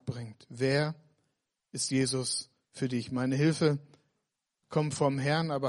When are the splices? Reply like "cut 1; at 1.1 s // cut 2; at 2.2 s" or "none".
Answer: none